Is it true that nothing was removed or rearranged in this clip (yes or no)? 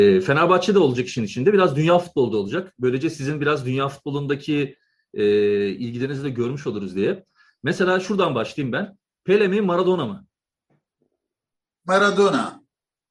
yes